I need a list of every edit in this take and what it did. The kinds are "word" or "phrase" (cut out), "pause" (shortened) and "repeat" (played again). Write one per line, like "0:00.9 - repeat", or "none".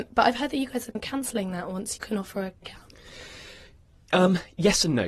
0:00.9 - word
0:02.0 - word
0:02.6 - word